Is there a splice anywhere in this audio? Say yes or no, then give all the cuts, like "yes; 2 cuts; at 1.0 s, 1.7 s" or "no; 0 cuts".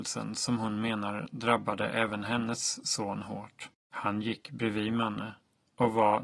yes; 1 cut; at 3.8 s